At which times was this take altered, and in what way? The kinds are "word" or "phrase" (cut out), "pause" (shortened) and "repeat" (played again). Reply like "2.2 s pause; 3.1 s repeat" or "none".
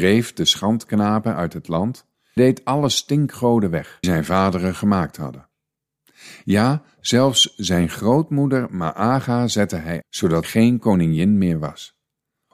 2.4 s word; 4.0 s word; 10.0 s word; 10.4 s word